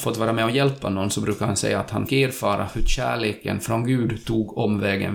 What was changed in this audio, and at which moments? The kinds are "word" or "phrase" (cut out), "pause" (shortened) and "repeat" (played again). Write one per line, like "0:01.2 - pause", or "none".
0:02.1 - word